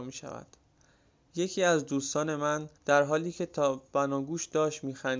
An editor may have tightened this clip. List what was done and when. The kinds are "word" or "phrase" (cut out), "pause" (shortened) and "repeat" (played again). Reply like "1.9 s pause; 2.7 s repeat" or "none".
2.8 s pause